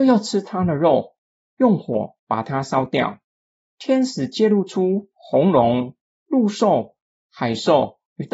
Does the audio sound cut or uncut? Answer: uncut